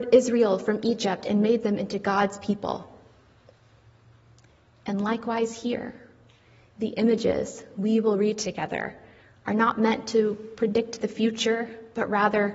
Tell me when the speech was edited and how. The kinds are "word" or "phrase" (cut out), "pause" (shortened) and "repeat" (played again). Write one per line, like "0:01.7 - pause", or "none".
none